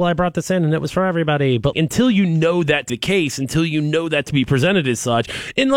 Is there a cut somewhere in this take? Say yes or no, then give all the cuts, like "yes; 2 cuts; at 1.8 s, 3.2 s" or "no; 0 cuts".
yes; 2 cuts; at 1.7 s, 2.9 s